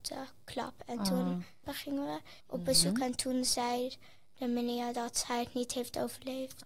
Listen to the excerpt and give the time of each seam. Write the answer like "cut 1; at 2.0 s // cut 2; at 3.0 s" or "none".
cut 1; at 2.4 s